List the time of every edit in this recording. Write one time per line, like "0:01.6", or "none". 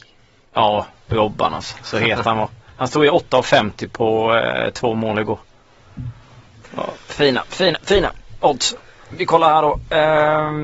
none